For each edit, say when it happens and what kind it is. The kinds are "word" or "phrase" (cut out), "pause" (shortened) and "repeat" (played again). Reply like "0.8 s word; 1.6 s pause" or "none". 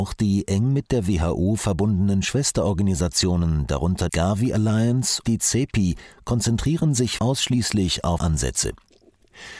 4.1 s word; 5.2 s word; 7.2 s word; 8.2 s word